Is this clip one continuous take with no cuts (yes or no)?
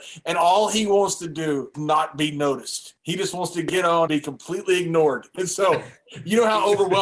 no